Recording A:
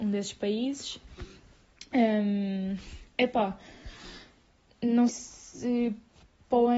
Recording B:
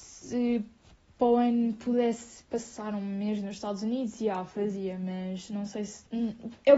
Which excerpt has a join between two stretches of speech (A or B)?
A